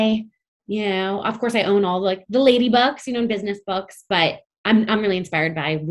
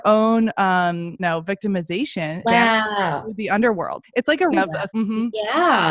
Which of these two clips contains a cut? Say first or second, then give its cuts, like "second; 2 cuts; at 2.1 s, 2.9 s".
second; 5 cuts; at 1.2 s, 2.4 s, 4.0 s, 4.5 s, 4.9 s